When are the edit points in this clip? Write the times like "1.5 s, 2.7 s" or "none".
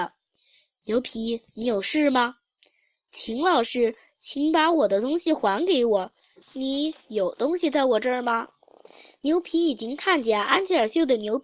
none